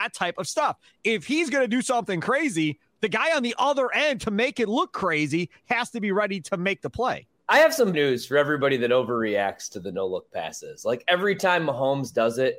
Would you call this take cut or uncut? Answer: cut